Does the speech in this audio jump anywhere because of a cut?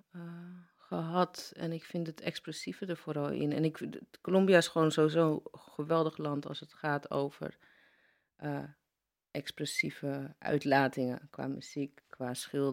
no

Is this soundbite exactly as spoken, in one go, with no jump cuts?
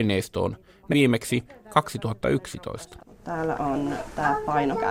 no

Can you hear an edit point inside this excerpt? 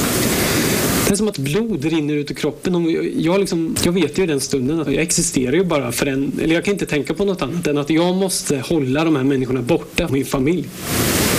yes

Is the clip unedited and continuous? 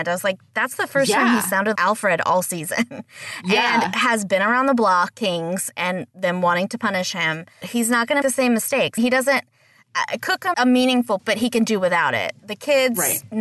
no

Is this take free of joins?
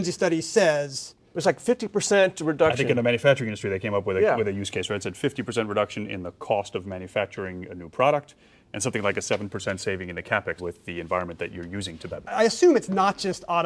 no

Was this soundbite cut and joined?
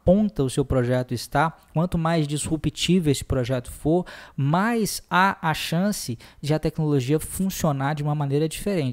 no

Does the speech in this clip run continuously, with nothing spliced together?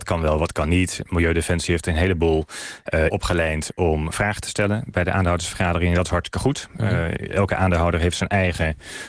no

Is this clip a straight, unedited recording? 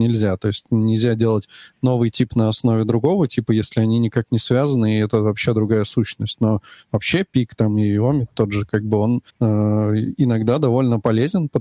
no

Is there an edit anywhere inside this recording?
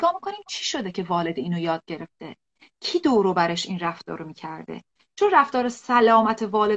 no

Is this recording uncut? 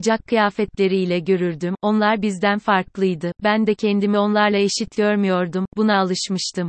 yes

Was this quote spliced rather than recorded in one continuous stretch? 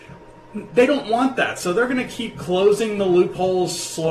no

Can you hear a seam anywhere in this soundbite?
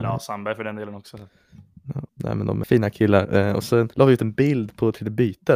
yes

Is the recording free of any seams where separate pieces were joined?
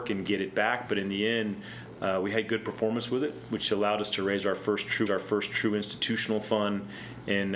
no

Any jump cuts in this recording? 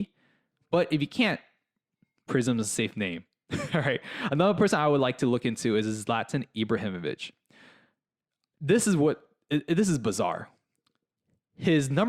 no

